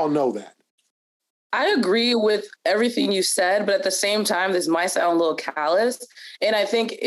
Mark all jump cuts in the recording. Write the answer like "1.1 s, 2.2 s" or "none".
none